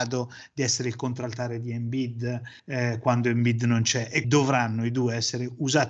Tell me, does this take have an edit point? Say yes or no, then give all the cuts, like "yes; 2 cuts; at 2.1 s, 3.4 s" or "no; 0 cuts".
yes; 2 cuts; at 2.6 s, 4.2 s